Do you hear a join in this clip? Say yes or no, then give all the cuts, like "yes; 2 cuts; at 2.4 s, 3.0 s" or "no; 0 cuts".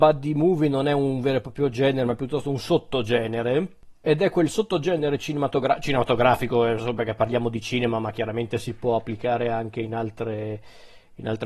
no; 0 cuts